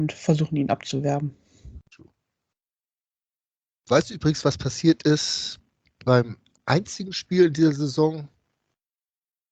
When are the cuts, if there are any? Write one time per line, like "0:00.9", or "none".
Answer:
none